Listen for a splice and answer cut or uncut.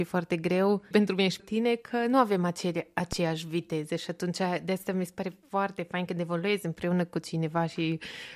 cut